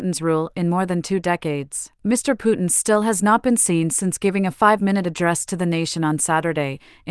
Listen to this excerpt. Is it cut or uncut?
cut